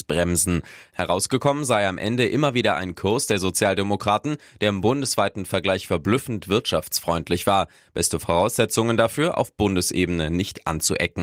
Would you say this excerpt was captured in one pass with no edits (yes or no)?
yes